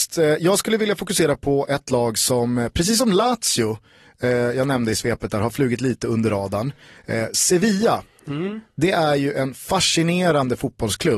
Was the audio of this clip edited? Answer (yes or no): no